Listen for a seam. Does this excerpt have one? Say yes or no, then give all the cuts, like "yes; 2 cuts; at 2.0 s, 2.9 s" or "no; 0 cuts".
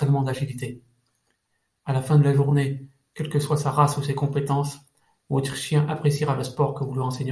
no; 0 cuts